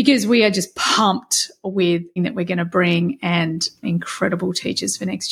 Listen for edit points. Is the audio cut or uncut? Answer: cut